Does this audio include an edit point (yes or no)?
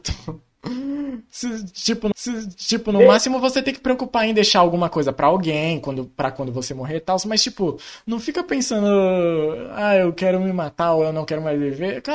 yes